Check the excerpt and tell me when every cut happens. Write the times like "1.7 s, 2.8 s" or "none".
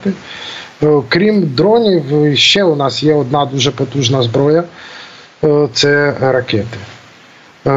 none